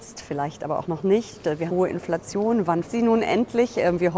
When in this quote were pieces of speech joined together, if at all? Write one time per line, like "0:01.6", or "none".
0:01.7
0:02.8

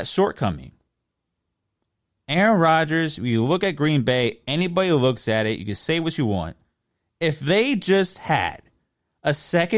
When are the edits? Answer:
none

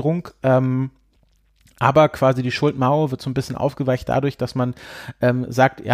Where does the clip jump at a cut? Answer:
none

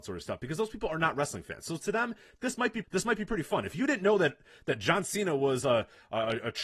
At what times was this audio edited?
0:02.8

